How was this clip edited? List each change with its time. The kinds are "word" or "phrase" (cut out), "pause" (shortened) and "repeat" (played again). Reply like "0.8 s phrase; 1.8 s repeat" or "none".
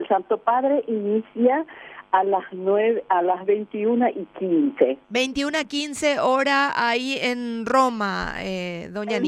5.0 s pause